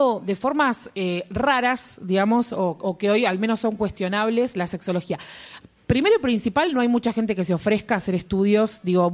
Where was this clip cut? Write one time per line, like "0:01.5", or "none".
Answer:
none